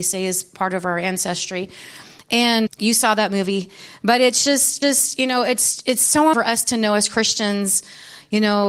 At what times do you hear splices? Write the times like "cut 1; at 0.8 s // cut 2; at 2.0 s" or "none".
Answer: cut 1; at 2.7 s // cut 2; at 4.8 s // cut 3; at 6.3 s